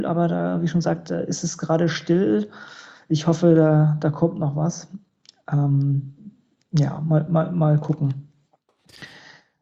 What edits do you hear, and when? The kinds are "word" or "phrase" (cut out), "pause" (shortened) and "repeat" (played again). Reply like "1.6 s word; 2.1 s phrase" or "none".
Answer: none